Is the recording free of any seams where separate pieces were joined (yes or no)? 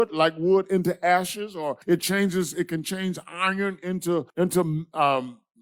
no